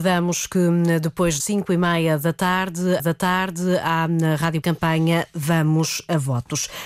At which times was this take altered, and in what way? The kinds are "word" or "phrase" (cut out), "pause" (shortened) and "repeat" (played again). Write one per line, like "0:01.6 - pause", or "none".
0:01.4 - word
0:03.0 - repeat
0:04.6 - phrase